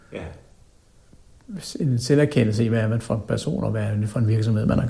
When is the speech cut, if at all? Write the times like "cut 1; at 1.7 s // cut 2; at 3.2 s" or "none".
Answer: none

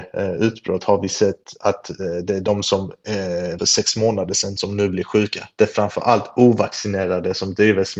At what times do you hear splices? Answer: cut 1; at 3.6 s

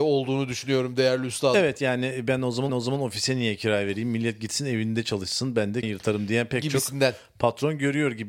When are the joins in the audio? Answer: cut 1; at 2.7 s // cut 2; at 5.8 s

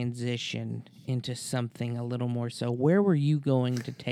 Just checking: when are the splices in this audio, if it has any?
cut 1; at 2.5 s

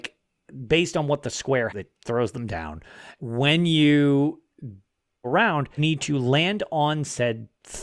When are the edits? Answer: cut 1; at 1.7 s // cut 2; at 3.2 s // cut 3; at 5.2 s // cut 4; at 5.8 s

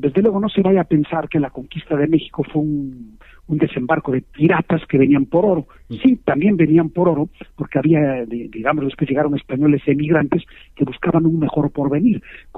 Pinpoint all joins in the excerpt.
none

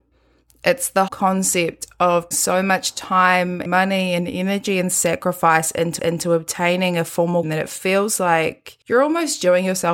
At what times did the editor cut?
cut 1; at 1.1 s // cut 2; at 2.3 s // cut 3; at 3.7 s // cut 4; at 6.0 s // cut 5; at 7.4 s // cut 6; at 8.8 s

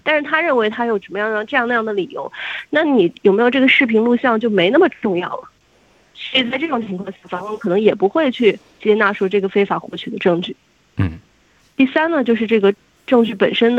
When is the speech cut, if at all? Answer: cut 1; at 11.6 s

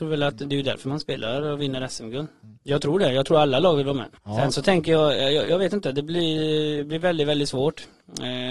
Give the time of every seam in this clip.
cut 1; at 2.6 s // cut 2; at 4.2 s

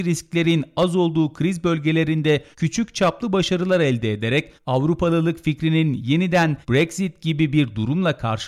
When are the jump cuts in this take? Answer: cut 1; at 2.5 s // cut 2; at 4.6 s // cut 3; at 6.6 s

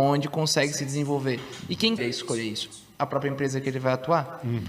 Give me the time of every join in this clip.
cut 1; at 2.0 s

